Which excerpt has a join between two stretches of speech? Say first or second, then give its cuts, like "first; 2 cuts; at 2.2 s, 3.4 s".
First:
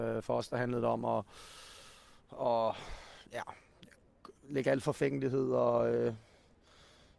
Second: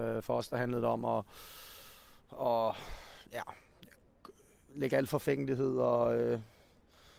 first; 1 cut; at 4.4 s